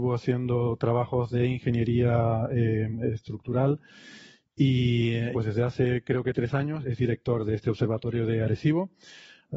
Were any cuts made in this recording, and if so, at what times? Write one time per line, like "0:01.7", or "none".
0:05.3
0:06.8